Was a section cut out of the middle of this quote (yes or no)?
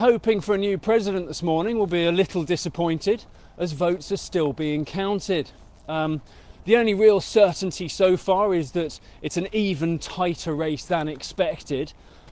no